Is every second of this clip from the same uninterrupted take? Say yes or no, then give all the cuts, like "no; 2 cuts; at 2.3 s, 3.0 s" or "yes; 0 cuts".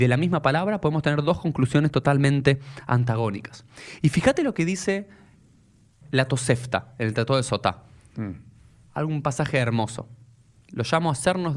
yes; 0 cuts